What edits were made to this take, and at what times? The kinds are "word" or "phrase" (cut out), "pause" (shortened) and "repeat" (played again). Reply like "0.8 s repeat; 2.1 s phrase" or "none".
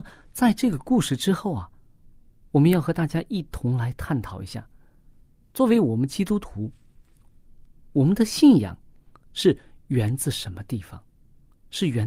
none